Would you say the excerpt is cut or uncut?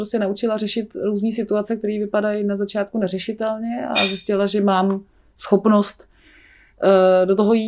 uncut